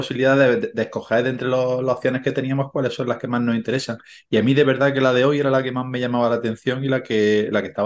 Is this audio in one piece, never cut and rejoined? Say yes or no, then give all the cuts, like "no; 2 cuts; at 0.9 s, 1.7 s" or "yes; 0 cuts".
yes; 0 cuts